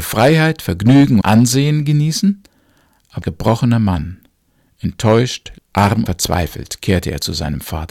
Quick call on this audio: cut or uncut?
cut